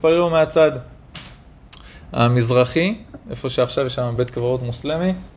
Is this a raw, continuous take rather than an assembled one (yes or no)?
yes